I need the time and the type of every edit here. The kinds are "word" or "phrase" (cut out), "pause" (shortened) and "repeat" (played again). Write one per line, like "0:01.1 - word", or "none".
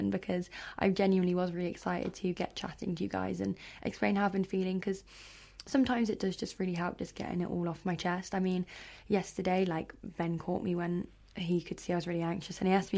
none